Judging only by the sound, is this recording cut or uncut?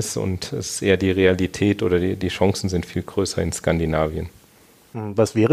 uncut